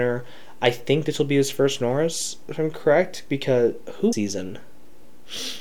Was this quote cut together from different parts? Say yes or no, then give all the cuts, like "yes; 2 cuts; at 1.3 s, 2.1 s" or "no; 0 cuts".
yes; 1 cut; at 4.1 s